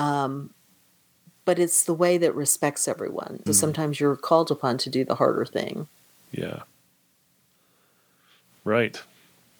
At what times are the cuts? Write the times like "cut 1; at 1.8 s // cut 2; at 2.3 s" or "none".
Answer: cut 1; at 3.5 s